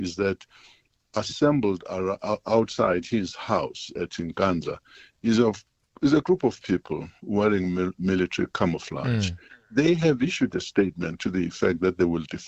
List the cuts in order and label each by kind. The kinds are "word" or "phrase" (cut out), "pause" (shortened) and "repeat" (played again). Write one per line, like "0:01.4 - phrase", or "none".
none